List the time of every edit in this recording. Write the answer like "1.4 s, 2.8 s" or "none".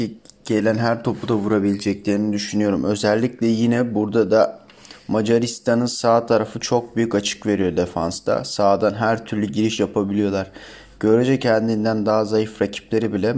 9.8 s